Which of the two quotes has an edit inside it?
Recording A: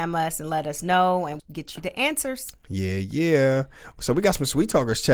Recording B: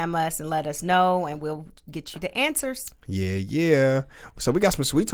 A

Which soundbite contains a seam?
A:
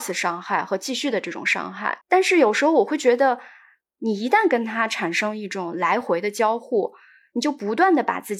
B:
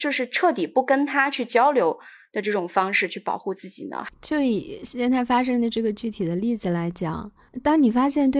A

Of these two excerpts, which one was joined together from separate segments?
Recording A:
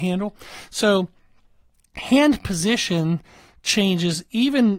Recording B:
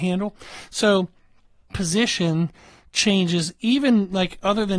B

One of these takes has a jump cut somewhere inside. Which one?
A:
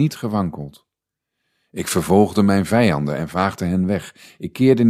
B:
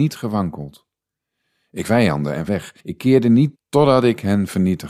B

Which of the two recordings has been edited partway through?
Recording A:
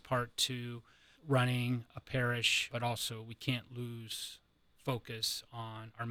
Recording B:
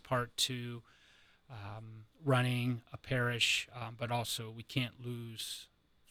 A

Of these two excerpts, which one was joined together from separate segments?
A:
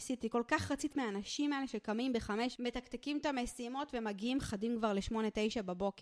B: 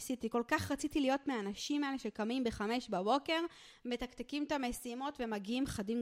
A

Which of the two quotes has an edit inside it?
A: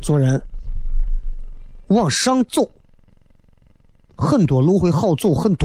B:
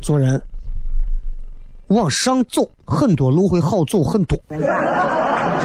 B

